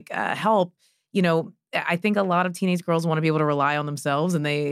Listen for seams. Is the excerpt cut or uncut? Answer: uncut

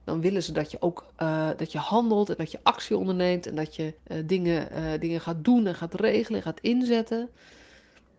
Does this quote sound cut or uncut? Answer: cut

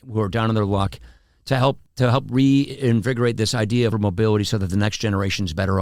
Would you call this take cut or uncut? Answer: cut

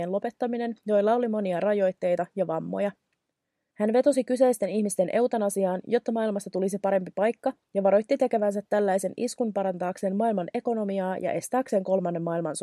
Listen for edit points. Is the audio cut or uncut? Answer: uncut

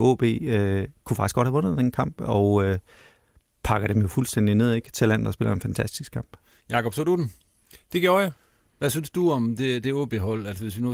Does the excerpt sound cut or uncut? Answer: uncut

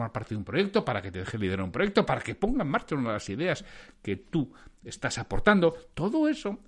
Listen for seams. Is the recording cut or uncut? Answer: uncut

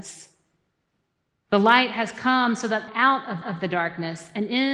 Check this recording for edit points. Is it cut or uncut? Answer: cut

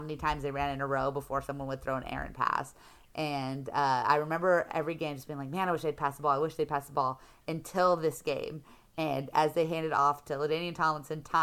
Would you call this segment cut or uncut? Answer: uncut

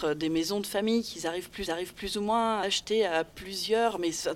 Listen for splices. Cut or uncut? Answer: cut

